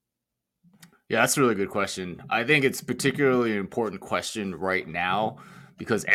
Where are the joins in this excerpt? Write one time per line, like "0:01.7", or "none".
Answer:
none